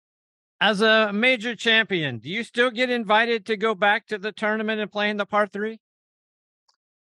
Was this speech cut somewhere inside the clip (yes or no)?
no